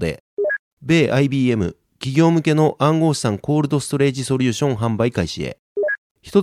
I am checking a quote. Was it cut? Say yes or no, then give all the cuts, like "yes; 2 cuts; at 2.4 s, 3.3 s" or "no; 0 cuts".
no; 0 cuts